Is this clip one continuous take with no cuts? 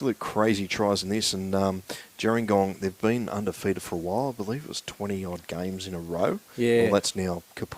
yes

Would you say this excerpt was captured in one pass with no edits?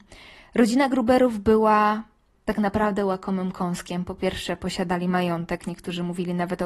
yes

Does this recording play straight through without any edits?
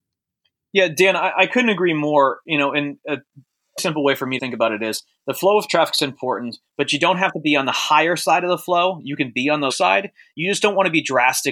no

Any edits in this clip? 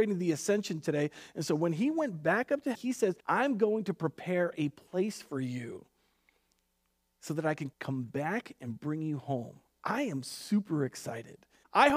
yes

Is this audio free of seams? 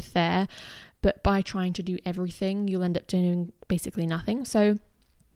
yes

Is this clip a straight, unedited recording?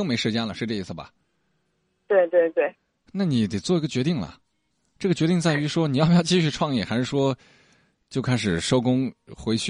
yes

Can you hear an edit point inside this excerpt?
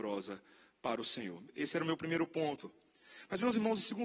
no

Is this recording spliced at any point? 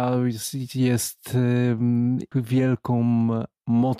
yes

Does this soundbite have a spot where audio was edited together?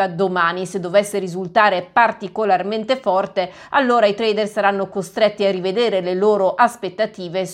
no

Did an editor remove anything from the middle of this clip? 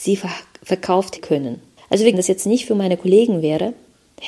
yes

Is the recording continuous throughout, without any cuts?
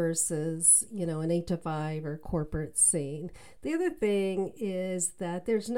yes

